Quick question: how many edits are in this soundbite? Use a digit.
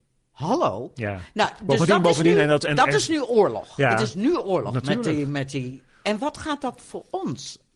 0